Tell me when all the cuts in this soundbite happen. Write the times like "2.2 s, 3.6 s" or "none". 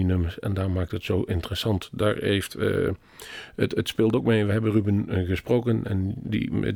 none